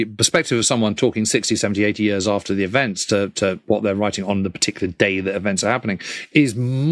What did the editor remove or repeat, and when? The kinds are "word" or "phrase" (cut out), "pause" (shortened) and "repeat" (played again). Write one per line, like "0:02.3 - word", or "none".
none